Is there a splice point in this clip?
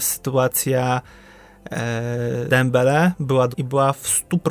yes; 2 cuts; at 2.5 s, 3.5 s

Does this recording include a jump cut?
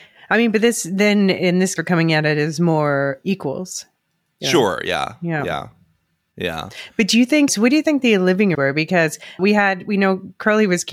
yes; 4 cuts; at 1.8 s, 7.5 s, 8.5 s, 9.4 s

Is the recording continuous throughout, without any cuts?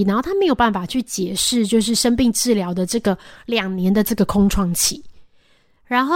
yes; 0 cuts

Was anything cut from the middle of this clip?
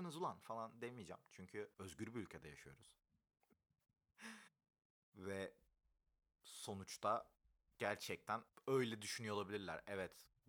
no; 0 cuts

